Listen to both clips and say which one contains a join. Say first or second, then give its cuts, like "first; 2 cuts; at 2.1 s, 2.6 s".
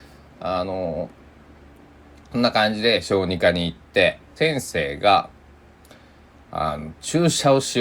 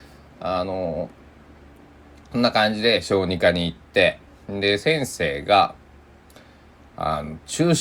first; 1 cut; at 4.4 s